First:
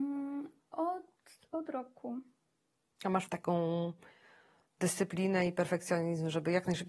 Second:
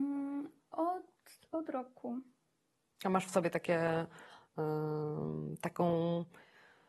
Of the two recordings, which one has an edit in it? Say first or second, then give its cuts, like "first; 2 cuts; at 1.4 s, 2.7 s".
first; 1 cut; at 3.3 s